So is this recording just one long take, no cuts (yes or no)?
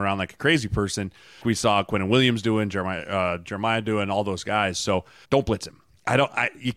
no